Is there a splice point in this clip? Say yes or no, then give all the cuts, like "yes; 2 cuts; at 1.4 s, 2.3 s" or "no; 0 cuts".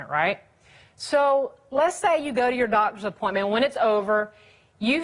no; 0 cuts